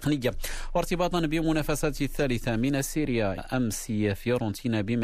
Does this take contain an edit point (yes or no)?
yes